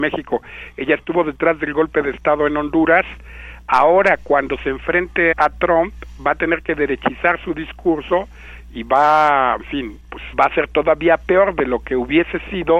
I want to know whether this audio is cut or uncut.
cut